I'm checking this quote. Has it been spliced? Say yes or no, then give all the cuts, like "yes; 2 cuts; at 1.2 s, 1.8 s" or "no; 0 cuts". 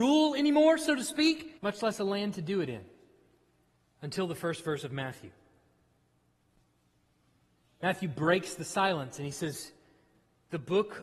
yes; 2 cuts; at 1.6 s, 3.7 s